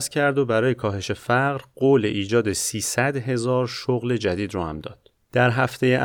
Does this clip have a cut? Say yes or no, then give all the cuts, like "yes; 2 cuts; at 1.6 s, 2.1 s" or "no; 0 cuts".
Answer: no; 0 cuts